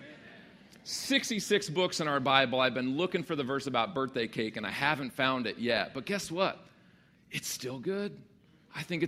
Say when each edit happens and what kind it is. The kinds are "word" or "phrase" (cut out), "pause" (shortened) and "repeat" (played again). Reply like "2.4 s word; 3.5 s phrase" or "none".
none